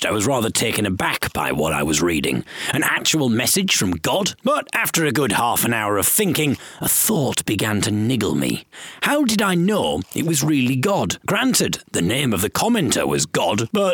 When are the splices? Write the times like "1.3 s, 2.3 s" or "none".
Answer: none